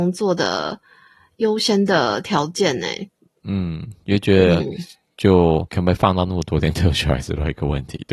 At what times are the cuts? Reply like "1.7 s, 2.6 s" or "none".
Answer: 5.7 s